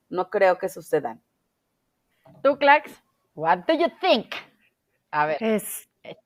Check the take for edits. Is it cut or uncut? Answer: cut